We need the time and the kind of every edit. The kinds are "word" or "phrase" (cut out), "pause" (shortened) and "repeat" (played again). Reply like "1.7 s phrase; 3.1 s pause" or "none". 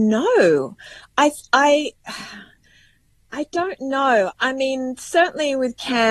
none